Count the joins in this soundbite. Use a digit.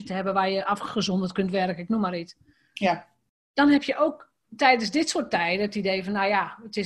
0